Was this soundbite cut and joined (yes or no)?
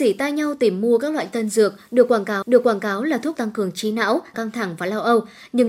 yes